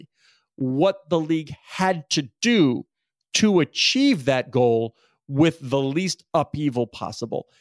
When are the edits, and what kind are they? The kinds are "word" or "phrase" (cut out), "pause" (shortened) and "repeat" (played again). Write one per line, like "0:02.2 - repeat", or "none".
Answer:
none